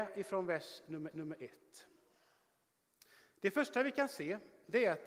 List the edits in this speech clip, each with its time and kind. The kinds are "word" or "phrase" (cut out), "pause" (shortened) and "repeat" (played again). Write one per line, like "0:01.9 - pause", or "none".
0:01.1 - repeat